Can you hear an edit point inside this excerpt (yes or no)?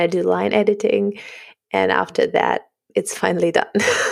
no